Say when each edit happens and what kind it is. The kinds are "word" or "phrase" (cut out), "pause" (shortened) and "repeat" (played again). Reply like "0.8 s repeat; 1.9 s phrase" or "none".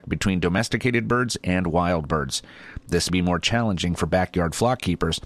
3.1 s word